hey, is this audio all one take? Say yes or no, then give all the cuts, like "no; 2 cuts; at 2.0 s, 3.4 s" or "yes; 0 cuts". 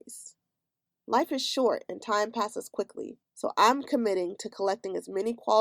no; 1 cut; at 3.2 s